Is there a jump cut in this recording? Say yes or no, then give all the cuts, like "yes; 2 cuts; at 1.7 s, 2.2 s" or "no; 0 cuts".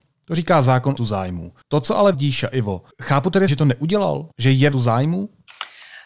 yes; 7 cuts; at 1.0 s, 1.6 s, 2.1 s, 2.9 s, 3.5 s, 4.3 s, 4.7 s